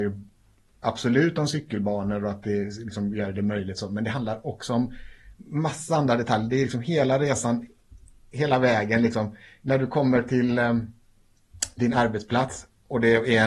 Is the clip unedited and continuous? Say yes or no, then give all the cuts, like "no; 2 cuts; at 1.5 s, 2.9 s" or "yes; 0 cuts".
yes; 0 cuts